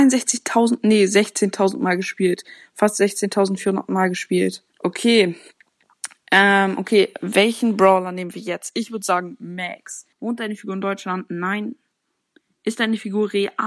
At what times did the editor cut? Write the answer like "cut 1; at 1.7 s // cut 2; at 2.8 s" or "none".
cut 1; at 4.7 s // cut 2; at 10.1 s